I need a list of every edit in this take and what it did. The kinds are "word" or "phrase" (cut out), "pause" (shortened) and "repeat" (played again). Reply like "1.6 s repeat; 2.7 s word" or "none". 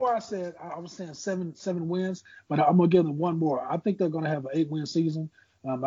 none